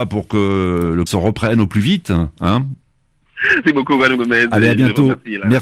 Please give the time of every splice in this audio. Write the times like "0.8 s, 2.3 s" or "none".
1.1 s, 3.6 s